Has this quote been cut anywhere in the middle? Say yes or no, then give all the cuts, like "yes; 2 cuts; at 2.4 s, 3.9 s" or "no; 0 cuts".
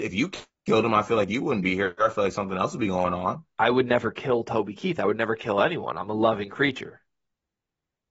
yes; 1 cut; at 3.5 s